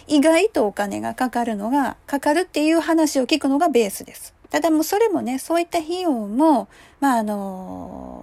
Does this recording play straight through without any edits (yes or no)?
no